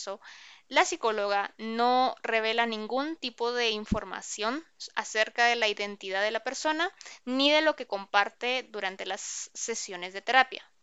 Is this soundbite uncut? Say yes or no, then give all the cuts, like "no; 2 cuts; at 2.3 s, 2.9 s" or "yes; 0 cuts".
yes; 0 cuts